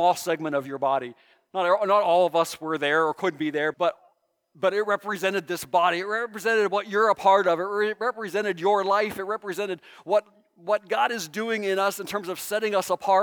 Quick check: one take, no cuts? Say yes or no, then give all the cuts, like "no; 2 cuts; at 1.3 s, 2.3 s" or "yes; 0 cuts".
no; 1 cut; at 3.7 s